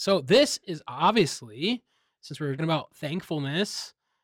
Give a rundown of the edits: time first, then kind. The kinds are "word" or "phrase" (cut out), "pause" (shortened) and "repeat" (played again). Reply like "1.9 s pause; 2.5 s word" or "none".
2.6 s word